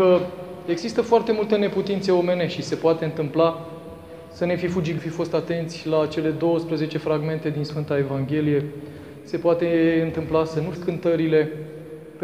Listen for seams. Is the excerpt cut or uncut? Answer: cut